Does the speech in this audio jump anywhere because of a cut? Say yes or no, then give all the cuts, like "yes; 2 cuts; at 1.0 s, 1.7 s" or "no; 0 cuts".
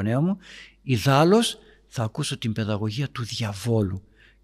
no; 0 cuts